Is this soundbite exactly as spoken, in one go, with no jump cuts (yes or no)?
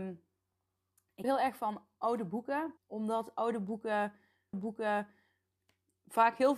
no